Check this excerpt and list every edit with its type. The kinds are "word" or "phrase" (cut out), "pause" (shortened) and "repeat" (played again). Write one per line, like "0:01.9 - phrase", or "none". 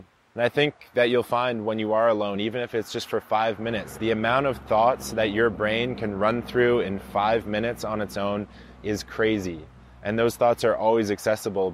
none